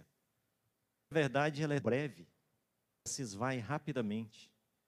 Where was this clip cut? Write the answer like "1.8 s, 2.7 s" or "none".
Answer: 1.1 s, 1.8 s, 3.1 s